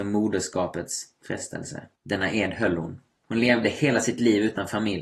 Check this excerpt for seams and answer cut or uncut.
cut